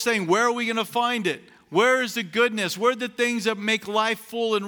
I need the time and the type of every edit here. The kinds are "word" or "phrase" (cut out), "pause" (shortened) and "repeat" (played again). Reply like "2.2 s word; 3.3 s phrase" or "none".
none